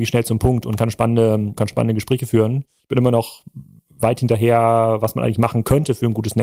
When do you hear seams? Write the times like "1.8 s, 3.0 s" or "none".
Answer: 1.6 s

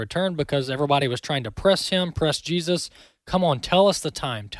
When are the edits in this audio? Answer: none

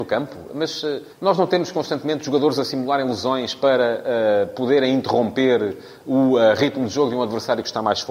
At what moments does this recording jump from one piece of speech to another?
1.1 s

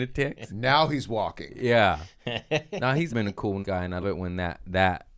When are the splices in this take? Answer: 3.1 s, 3.6 s, 4.0 s

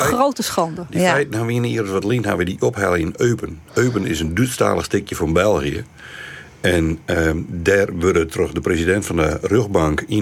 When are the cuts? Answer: 3.6 s

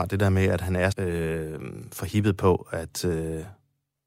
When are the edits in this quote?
0.9 s

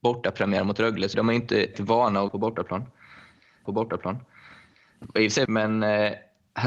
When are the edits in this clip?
1.1 s, 1.7 s, 2.3 s, 3.7 s, 5.5 s

